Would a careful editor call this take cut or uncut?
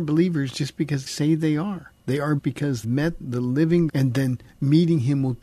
cut